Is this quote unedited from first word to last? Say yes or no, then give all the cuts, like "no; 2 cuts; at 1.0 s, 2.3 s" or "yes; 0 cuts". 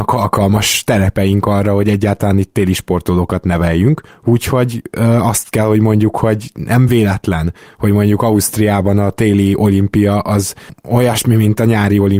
yes; 0 cuts